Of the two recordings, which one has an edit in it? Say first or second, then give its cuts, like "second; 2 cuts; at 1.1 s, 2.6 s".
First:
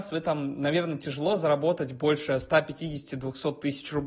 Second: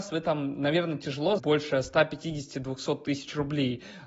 second; 1 cut; at 1.4 s